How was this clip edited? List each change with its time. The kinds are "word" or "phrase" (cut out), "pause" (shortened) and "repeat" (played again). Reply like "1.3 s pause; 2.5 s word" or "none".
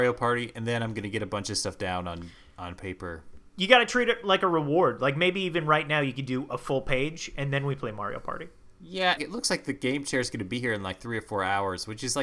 9.2 s phrase

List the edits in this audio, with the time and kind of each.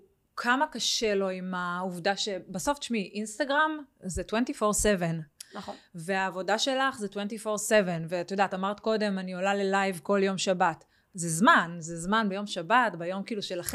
none

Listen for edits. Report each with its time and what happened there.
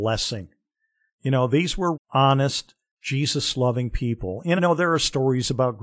1.9 s word; 4.6 s phrase

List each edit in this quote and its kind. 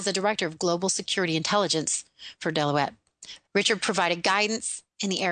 3.5 s pause

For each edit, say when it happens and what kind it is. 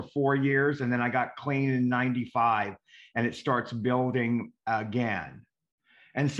none

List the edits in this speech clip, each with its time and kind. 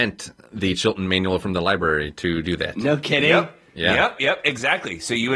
4.2 s word

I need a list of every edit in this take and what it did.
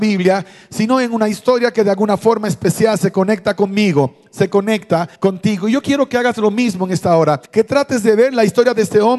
5.2 s pause; 7.5 s pause

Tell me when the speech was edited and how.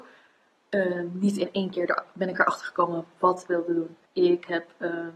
3.5 s phrase; 4.1 s pause

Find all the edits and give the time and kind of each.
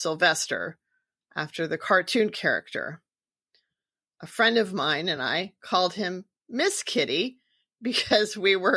none

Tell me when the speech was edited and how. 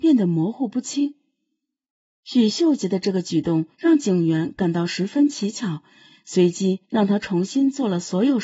3.7 s pause; 6.8 s pause

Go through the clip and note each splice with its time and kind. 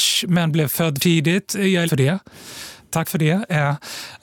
1.0 s word; 1.9 s word; 3.0 s word

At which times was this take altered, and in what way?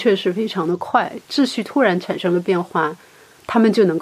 1.2 s pause

